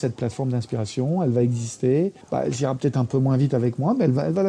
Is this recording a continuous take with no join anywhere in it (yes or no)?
no